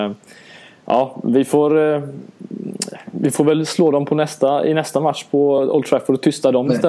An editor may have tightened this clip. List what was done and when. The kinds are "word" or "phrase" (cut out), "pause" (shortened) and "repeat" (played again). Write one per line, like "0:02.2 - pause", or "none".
none